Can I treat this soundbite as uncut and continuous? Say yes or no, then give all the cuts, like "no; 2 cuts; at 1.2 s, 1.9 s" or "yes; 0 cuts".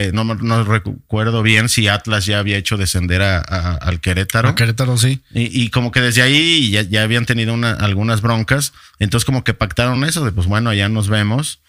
yes; 0 cuts